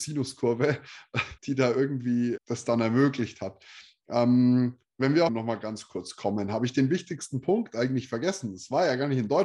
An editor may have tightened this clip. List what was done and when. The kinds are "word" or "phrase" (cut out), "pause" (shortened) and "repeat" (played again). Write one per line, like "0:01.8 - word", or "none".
0:01.4 - pause
0:02.4 - word
0:05.3 - phrase